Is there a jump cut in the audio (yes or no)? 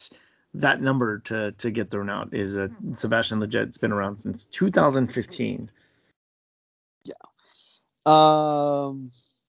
no